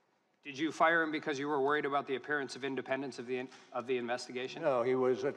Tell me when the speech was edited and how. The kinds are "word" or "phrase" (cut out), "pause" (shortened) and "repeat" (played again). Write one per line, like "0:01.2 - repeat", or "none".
none